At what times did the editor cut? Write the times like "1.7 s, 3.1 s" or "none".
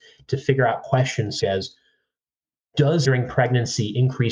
1.4 s, 3.0 s